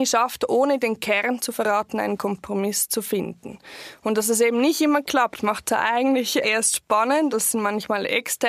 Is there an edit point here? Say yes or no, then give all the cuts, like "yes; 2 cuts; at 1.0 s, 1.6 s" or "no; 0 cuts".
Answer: yes; 2 cuts; at 6.4 s, 7.3 s